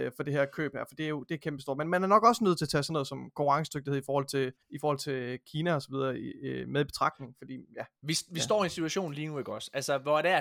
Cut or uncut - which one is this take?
cut